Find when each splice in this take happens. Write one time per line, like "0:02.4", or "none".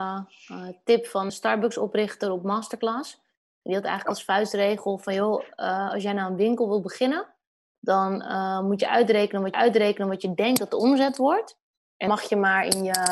0:01.3
0:09.5
0:12.1